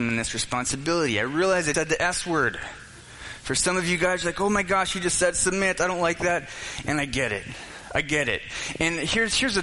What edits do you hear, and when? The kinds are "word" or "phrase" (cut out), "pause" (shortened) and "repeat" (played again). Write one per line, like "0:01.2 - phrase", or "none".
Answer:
0:01.7 - word